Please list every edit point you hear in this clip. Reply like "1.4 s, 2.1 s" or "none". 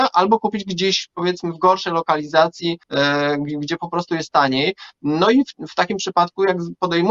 2.8 s